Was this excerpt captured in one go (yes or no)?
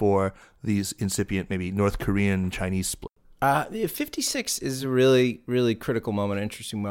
yes